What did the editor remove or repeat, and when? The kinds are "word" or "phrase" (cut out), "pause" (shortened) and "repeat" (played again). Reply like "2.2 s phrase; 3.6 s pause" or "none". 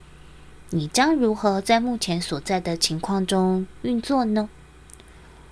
none